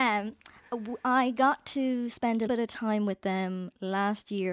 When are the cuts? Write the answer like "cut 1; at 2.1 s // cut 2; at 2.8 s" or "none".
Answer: cut 1; at 2.5 s